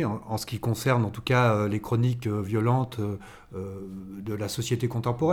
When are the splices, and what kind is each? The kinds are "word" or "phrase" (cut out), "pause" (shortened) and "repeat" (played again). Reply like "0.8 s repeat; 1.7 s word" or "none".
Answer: none